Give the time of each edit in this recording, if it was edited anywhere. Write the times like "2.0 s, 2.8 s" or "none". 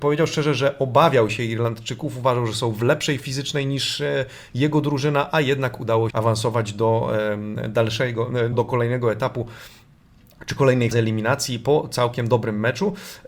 3.2 s, 6.1 s, 8.5 s, 10.9 s

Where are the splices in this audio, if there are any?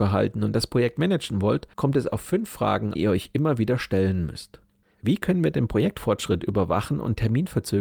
1.0 s, 1.7 s, 2.9 s, 4.8 s

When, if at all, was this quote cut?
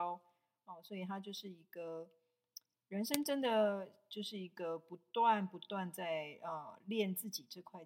none

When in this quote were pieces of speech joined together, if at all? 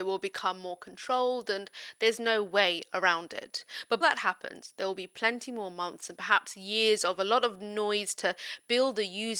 4.0 s

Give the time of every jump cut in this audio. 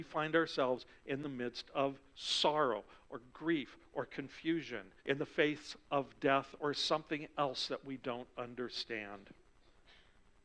5.0 s

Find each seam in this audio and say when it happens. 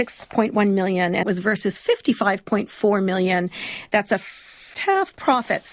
1.2 s, 4.7 s

